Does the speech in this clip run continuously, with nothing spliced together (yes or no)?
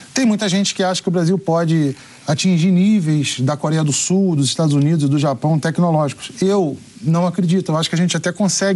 yes